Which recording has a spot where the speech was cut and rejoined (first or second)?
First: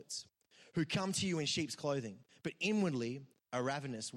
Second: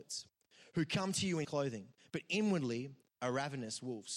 second